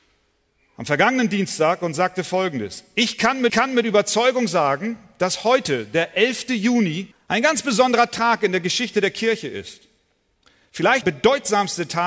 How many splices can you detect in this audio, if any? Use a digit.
3